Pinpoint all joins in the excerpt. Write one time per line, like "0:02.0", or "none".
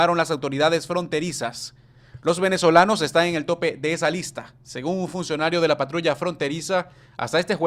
none